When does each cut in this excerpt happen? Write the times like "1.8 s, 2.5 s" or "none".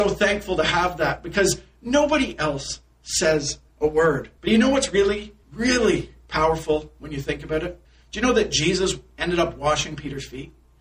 3.7 s, 4.4 s, 5.4 s, 7.8 s